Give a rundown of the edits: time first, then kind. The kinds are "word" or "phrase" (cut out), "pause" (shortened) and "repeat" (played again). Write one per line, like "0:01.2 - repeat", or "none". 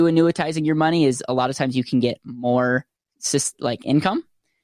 none